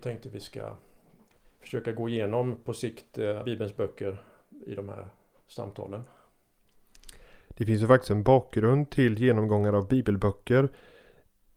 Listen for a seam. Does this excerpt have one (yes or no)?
yes